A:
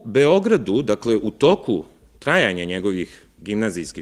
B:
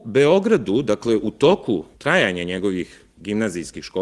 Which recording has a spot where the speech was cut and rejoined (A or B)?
B